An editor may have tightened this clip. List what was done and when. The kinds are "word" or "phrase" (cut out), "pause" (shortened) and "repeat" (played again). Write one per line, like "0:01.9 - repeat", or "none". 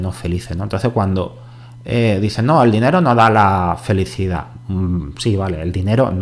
none